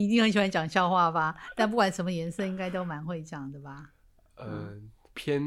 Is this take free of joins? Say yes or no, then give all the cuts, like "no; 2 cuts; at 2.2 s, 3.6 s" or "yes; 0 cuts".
yes; 0 cuts